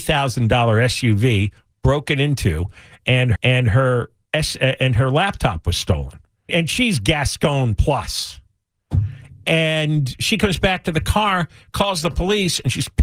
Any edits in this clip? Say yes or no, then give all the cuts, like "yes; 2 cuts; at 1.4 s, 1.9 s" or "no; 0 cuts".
yes; 2 cuts; at 3.4 s, 6.5 s